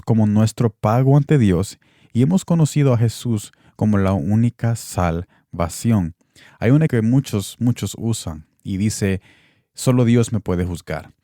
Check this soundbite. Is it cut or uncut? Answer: cut